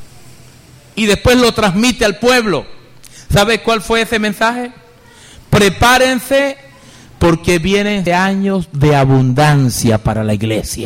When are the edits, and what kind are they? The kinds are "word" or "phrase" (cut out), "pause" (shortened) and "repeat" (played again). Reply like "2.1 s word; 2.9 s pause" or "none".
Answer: 8.1 s word